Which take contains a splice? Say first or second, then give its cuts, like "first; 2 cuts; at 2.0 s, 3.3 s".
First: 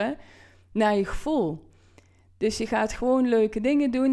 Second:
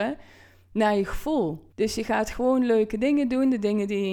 second; 1 cut; at 1.7 s